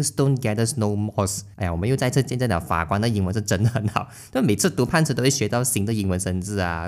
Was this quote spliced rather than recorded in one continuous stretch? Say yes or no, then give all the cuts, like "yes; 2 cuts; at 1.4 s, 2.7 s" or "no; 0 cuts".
yes; 1 cut; at 1.5 s